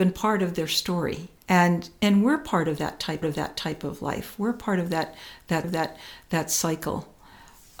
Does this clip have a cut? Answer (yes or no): yes